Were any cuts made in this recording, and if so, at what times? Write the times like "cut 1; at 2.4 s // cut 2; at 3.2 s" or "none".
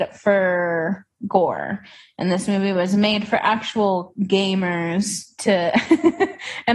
none

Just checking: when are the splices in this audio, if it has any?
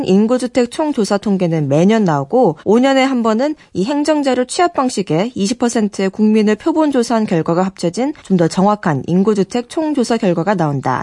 cut 1; at 2.6 s // cut 2; at 8.2 s

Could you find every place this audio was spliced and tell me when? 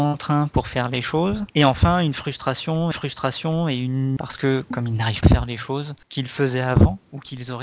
cut 1; at 1.5 s // cut 2; at 2.9 s // cut 3; at 4.2 s // cut 4; at 5.2 s // cut 5; at 6.0 s

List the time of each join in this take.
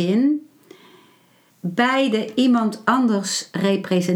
cut 1; at 1.5 s

